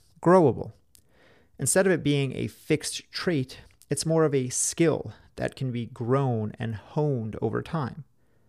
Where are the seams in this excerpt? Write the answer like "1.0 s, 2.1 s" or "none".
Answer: none